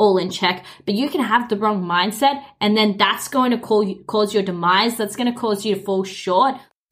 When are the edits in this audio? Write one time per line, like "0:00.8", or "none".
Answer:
none